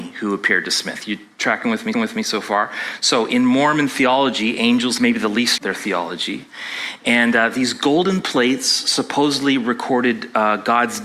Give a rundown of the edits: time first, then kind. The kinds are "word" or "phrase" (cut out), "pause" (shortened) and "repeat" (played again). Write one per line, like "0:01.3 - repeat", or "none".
0:01.9 - repeat
0:05.0 - phrase
0:05.6 - phrase